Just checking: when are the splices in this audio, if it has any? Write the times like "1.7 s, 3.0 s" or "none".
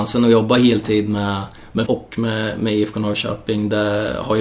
1.9 s